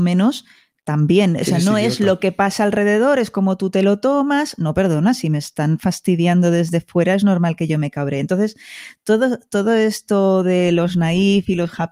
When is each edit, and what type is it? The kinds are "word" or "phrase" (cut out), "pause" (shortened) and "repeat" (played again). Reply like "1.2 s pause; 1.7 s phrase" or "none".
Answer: none